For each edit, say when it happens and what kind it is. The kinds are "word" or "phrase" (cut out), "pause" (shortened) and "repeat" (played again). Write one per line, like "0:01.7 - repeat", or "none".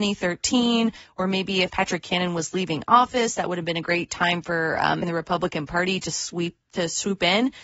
0:01.7 - phrase
0:05.0 - phrase